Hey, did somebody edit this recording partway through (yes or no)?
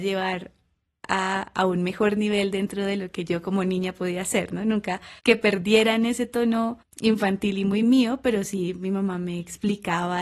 yes